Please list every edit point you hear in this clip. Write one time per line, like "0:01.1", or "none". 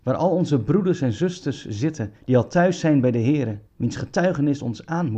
0:02.2
0:03.7